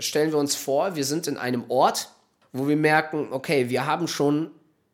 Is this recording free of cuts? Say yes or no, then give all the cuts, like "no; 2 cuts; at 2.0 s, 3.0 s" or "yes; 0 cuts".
no; 1 cut; at 2.4 s